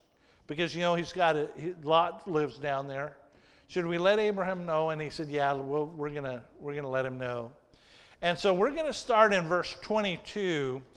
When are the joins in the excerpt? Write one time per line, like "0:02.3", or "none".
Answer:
none